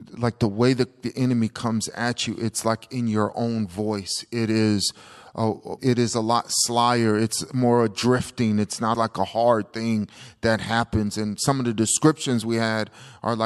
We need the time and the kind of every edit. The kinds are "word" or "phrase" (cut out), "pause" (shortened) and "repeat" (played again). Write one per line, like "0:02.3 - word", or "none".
0:05.8 - word
0:08.9 - word